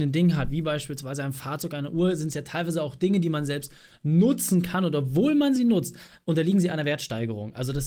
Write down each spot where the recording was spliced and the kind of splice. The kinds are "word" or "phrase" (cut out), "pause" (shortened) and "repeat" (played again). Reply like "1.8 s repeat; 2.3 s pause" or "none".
none